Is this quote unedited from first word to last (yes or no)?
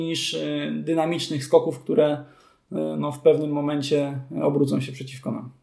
yes